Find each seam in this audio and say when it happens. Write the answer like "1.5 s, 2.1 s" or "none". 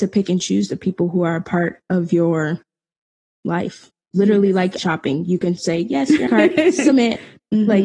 4.8 s, 6.3 s